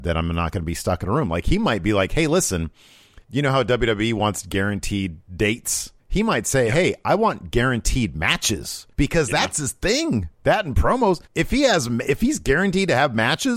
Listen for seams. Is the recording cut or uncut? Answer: cut